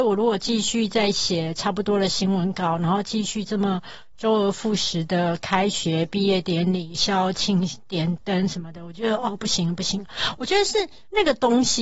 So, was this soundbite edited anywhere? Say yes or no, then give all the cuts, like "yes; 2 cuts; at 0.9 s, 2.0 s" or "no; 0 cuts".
no; 0 cuts